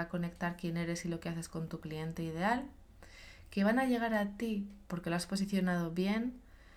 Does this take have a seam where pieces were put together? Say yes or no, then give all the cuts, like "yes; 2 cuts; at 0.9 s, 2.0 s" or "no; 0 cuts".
yes; 1 cut; at 4.9 s